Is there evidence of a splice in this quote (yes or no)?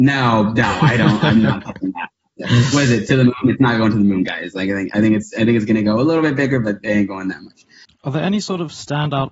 no